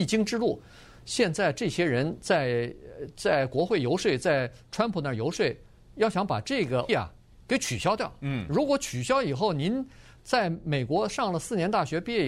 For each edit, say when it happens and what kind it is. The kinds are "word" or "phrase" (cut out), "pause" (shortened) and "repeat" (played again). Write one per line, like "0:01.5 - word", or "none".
0:06.9 - word